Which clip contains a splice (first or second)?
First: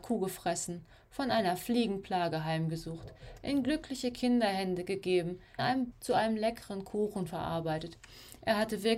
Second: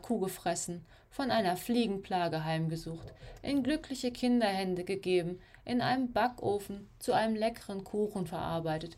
first